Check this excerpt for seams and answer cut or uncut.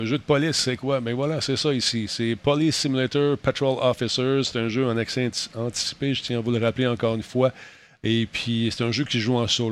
uncut